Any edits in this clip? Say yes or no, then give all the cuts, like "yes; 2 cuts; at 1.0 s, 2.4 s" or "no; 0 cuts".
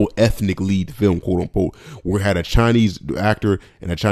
no; 0 cuts